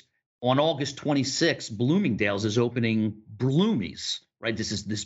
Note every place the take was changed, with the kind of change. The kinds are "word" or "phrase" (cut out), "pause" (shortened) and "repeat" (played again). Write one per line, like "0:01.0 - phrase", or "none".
none